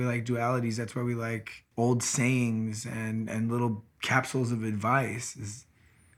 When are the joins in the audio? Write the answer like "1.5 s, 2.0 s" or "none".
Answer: 1.7 s, 3.9 s